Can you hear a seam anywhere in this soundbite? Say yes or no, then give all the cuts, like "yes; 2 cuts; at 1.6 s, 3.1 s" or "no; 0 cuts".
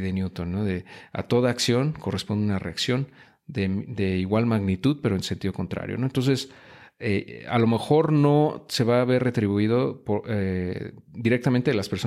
no; 0 cuts